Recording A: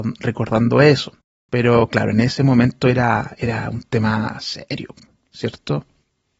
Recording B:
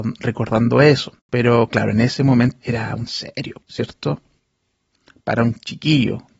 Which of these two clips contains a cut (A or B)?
B